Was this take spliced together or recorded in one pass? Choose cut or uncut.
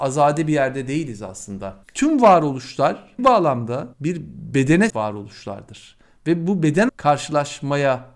cut